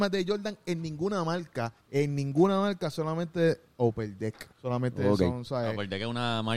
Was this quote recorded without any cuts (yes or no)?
no